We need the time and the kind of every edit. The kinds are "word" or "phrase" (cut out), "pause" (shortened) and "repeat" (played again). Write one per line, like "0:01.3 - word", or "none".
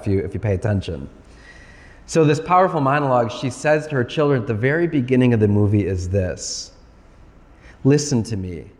none